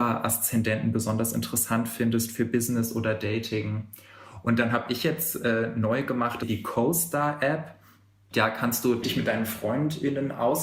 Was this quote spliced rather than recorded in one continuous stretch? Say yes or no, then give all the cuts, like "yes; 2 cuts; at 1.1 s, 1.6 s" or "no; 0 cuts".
no; 0 cuts